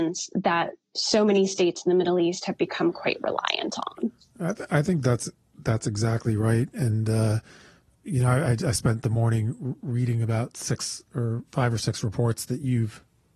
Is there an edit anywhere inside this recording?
no; 0 cuts

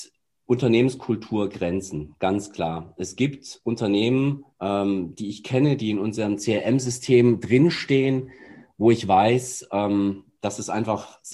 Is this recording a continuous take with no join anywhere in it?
no; 1 cut; at 4.5 s

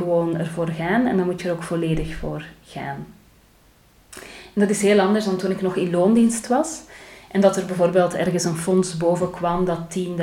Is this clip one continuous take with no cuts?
yes; 0 cuts

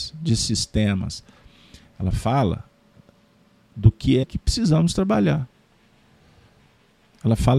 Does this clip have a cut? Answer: yes; 1 cut; at 4.2 s

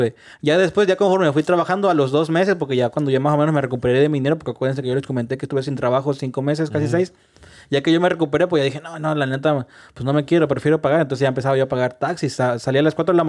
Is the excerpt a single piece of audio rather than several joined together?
yes; 0 cuts

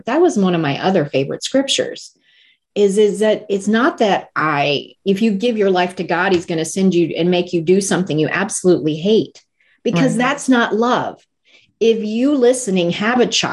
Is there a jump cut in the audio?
no; 0 cuts

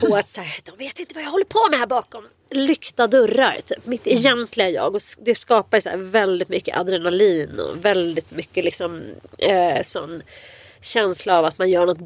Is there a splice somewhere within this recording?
no; 0 cuts

